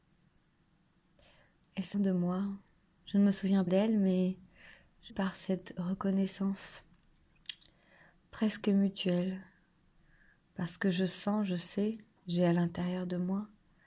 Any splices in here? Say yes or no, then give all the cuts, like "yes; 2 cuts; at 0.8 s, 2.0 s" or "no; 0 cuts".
yes; 3 cuts; at 1.9 s, 3.7 s, 5.1 s